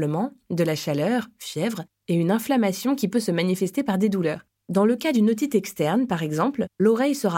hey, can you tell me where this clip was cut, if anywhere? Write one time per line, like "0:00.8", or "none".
none